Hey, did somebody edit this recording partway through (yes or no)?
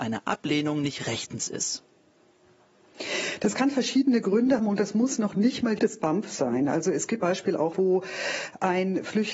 yes